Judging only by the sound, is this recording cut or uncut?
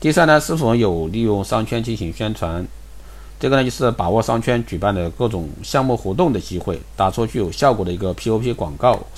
uncut